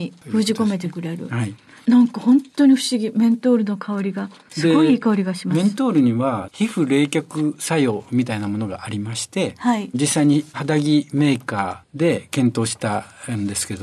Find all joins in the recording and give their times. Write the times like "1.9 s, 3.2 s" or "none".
none